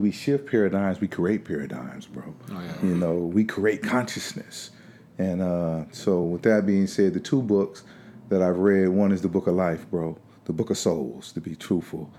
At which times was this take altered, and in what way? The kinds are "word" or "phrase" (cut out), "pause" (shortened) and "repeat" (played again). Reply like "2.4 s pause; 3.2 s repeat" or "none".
none